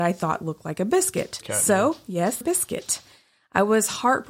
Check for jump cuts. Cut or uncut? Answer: cut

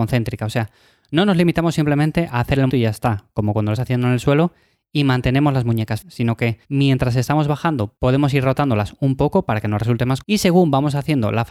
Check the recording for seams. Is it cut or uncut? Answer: cut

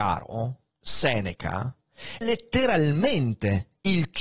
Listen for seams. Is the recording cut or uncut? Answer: cut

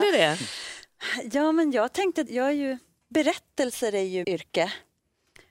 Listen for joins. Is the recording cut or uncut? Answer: cut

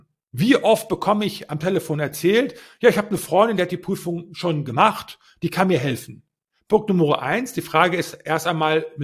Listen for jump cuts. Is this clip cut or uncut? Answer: uncut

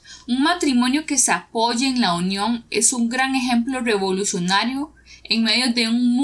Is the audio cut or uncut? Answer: uncut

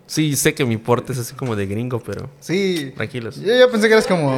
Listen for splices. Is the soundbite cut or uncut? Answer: uncut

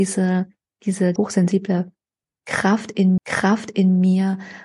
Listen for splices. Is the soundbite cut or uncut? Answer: cut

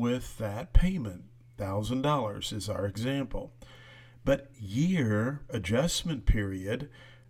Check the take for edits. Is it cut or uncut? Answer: cut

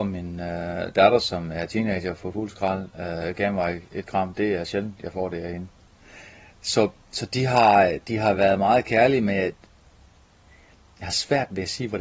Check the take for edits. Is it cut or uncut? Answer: uncut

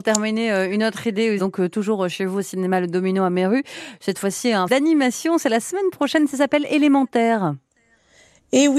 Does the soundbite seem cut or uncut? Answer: cut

